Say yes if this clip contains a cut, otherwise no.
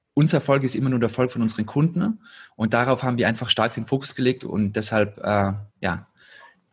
yes